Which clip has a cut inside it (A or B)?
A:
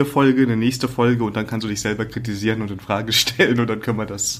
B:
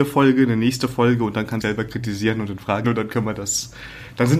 B